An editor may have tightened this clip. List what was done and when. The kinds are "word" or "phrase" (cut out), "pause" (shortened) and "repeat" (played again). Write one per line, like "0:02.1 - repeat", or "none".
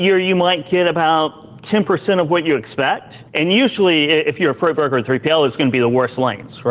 0:03.3 - pause